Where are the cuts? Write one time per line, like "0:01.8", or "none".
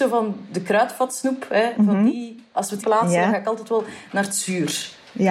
0:02.8